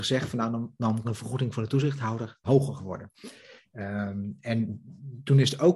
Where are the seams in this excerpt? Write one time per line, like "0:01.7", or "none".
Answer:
0:01.0
0:02.4

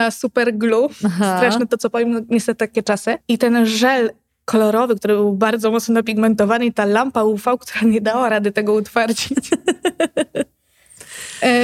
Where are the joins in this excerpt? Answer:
none

